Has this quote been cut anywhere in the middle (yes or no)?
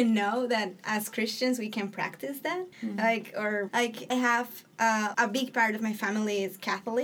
yes